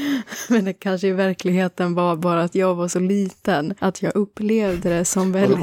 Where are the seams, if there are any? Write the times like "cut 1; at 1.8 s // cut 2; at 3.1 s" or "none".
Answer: cut 1; at 3.8 s